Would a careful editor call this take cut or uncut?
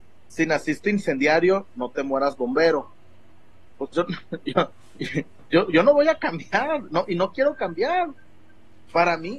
uncut